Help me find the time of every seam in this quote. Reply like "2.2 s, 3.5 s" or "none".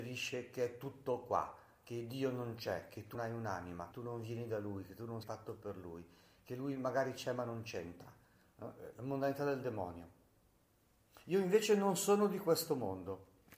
3.1 s, 3.9 s, 5.2 s